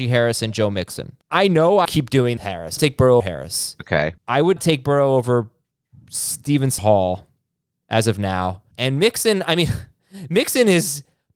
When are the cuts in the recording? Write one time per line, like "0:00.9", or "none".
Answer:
0:01.2
0:01.8
0:02.4
0:02.8
0:03.2
0:04.2
0:04.6
0:06.8
0:08.7